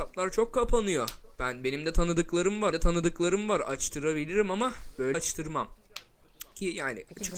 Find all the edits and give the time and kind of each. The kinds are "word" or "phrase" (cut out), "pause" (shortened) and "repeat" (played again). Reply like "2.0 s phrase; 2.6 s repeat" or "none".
2.7 s repeat; 5.1 s word